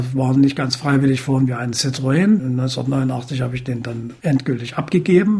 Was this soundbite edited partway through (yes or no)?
no